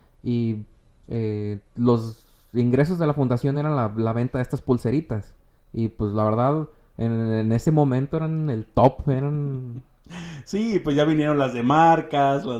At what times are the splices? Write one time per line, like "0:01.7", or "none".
none